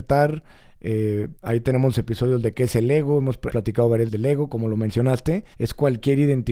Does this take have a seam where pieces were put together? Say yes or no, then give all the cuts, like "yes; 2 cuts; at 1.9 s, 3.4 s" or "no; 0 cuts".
yes; 4 cuts; at 1.4 s, 3.5 s, 4.1 s, 5.5 s